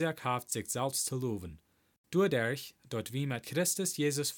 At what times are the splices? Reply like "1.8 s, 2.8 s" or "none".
none